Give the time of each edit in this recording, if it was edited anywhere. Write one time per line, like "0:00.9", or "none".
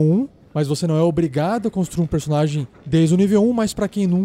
none